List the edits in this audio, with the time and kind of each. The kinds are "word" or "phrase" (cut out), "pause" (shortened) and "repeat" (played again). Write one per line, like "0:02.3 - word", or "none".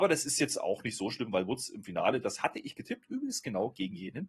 none